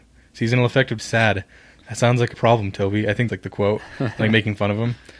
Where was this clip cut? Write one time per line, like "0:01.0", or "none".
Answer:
0:01.0
0:02.3
0:03.3